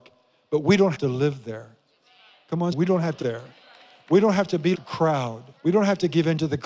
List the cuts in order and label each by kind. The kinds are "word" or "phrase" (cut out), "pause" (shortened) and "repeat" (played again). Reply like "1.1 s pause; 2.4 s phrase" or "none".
0.9 s word; 2.7 s word; 3.2 s word; 4.7 s word; 5.5 s pause

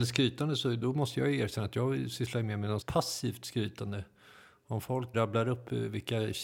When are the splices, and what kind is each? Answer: 2.8 s word; 5.1 s word

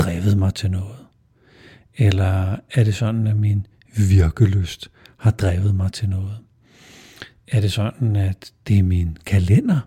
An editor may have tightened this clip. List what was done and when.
none

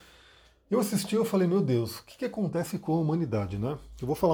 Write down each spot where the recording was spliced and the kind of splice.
none

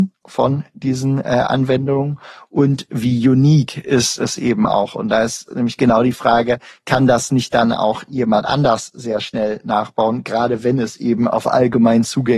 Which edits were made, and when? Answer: none

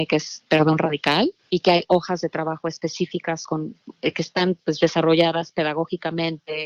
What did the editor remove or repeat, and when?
1.4 s pause

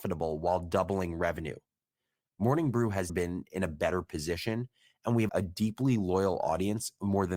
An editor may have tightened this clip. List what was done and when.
3.1 s word; 5.3 s word

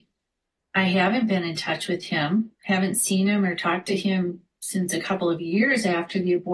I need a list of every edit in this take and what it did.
2.5 s pause

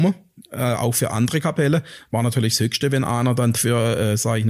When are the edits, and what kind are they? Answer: 3.5 s word

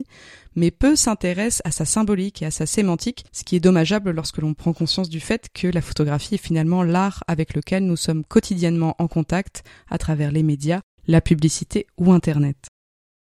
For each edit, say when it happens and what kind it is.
3.3 s pause

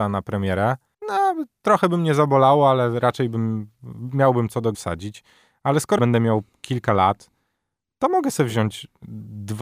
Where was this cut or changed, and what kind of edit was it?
0.9 s pause; 4.7 s word; 6.0 s phrase

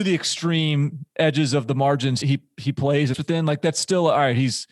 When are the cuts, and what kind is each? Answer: 2.2 s word; 3.1 s word

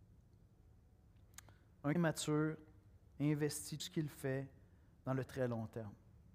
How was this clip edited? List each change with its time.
1.9 s word; 3.8 s word; 5.3 s word

